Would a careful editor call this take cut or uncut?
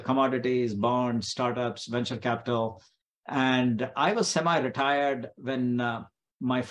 uncut